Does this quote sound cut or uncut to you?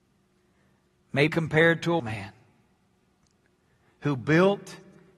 cut